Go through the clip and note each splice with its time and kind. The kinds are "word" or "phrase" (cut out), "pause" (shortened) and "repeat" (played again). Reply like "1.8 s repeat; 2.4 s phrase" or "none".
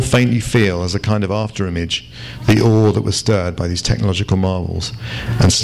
none